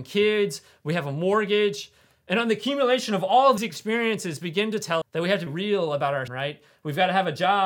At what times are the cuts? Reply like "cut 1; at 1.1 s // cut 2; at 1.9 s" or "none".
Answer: cut 1; at 3.6 s // cut 2; at 5.0 s // cut 3; at 5.5 s // cut 4; at 6.3 s